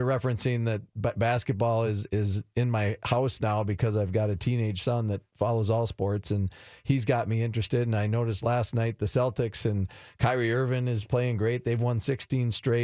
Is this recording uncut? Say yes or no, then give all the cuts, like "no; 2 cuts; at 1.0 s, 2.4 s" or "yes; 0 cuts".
yes; 0 cuts